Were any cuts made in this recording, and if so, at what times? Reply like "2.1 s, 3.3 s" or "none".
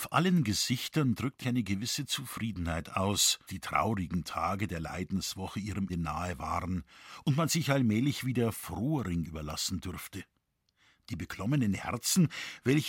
1.4 s, 3.5 s, 5.9 s, 9.2 s